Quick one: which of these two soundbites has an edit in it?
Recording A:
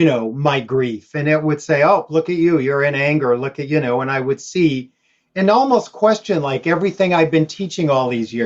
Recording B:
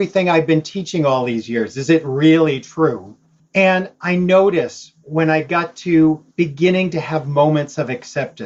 B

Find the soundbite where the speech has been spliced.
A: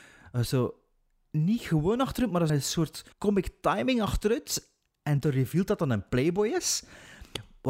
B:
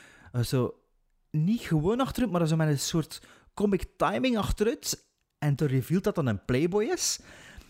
A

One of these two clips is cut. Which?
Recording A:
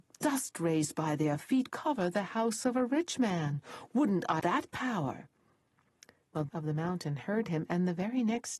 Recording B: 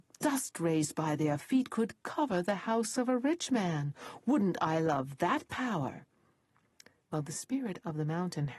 A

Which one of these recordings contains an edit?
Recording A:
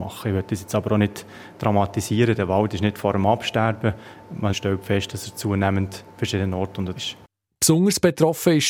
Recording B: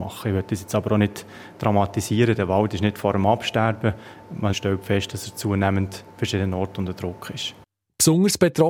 A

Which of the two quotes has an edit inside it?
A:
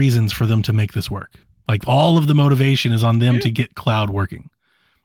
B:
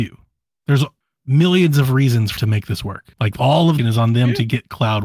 B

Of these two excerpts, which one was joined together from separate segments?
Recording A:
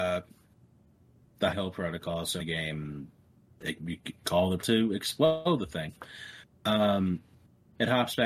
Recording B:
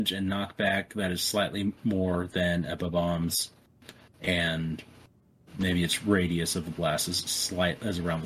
A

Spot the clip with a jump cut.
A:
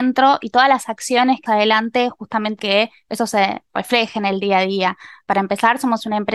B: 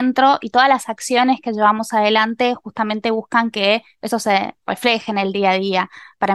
A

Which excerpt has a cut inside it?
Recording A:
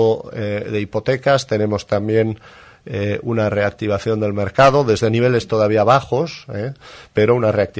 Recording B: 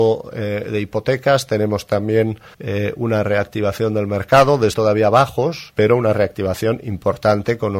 B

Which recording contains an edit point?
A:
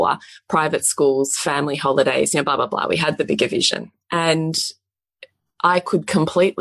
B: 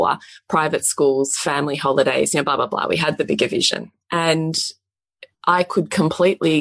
B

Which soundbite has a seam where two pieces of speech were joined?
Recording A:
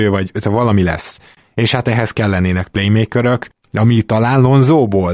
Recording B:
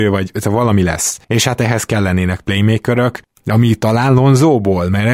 B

